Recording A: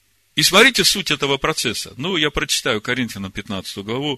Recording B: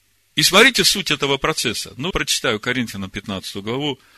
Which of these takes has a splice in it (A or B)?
B